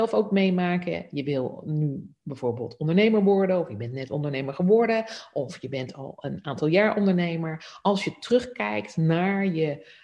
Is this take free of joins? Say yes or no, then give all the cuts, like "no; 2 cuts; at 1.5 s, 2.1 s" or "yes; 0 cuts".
yes; 0 cuts